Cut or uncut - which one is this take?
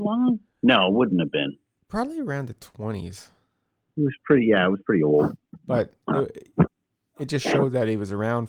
uncut